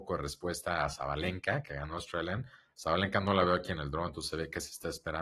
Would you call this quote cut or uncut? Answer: uncut